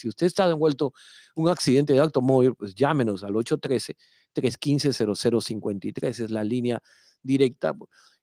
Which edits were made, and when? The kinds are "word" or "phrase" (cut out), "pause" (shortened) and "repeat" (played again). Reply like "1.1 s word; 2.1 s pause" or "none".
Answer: none